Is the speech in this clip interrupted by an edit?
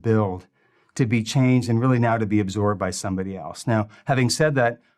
no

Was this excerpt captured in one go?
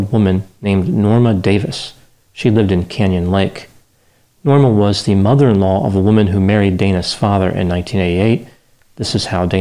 yes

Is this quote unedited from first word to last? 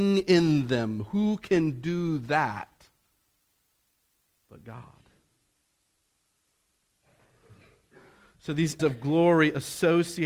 no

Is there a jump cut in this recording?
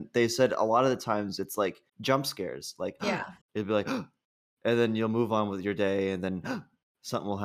yes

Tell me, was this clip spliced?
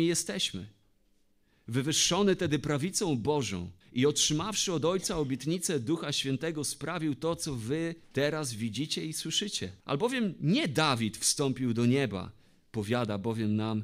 yes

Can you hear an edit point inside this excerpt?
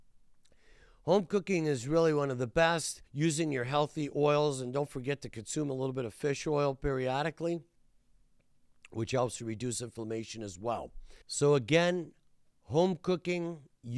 yes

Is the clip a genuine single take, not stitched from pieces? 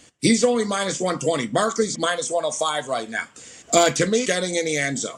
no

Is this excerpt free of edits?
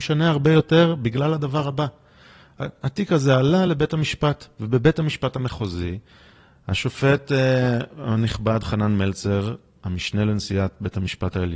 yes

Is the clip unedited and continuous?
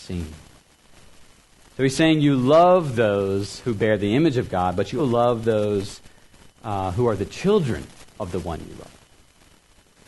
no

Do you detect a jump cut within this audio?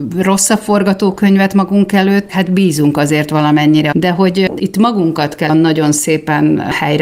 yes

